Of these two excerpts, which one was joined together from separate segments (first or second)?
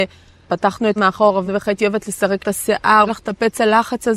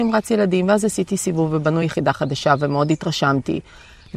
first